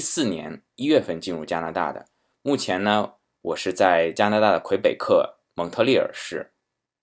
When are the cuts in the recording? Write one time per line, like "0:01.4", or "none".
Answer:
none